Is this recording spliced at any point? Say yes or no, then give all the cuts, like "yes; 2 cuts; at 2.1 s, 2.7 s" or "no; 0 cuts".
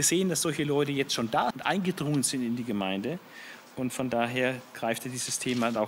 yes; 1 cut; at 1.5 s